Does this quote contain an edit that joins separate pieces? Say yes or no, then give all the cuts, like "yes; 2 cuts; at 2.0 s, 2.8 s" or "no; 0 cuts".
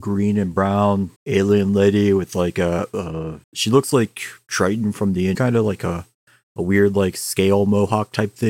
yes; 3 cuts; at 1.2 s, 3.4 s, 5.3 s